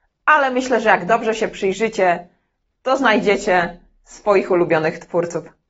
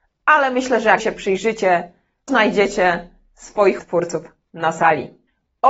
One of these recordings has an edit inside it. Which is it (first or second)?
second